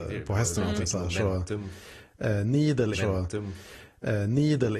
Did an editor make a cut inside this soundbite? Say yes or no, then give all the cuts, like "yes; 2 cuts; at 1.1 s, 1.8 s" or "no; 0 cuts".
yes; 1 cut; at 2.9 s